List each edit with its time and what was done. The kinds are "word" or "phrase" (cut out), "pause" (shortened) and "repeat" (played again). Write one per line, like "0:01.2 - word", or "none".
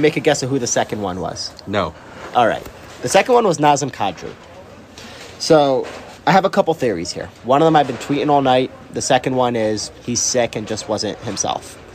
0:06.2 - pause